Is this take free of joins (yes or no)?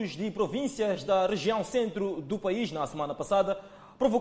yes